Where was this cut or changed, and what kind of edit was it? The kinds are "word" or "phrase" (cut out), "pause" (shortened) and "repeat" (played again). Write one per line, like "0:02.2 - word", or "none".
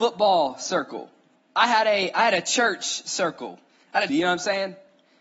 0:01.3 - pause
0:03.7 - pause
0:04.1 - phrase